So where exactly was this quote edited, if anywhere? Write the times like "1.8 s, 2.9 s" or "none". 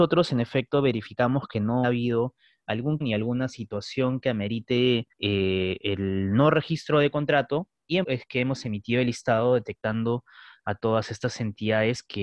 1.8 s, 3.0 s, 5.1 s, 8.0 s